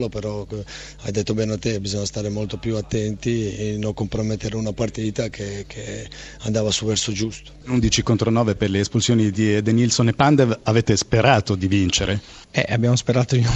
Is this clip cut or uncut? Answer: uncut